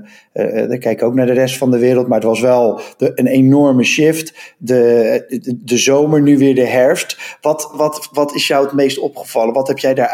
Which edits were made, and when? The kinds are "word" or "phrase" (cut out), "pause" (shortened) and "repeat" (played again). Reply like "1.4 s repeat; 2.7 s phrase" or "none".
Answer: 7.7 s word